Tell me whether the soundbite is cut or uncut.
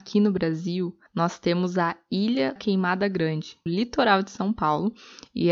cut